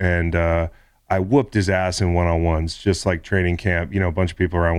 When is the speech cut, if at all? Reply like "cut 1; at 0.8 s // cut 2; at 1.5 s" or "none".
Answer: none

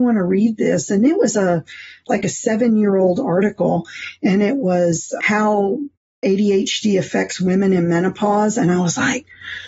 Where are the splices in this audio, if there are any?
none

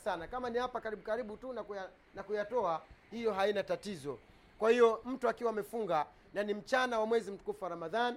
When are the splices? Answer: none

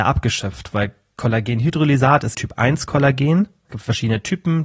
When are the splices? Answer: cut 1; at 2.3 s // cut 2; at 3.7 s

